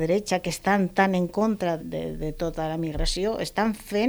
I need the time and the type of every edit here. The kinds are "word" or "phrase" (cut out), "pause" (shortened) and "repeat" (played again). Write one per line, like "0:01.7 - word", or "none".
0:01.8 - word